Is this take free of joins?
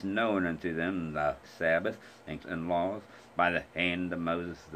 no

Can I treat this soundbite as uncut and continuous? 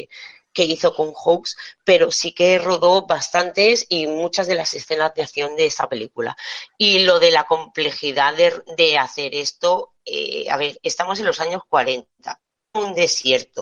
yes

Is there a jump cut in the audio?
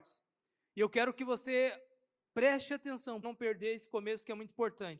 yes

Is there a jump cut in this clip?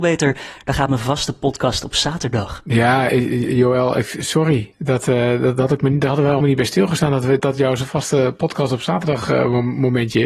yes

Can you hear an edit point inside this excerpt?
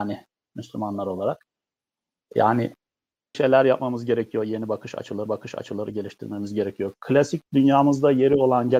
yes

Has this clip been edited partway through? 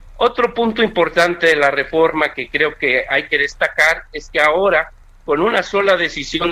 no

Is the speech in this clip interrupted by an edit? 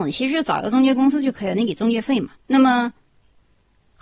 yes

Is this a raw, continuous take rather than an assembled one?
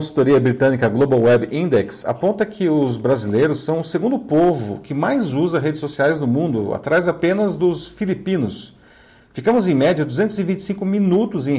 yes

